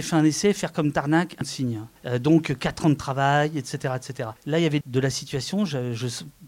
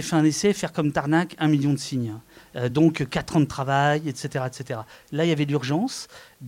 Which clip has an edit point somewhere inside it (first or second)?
first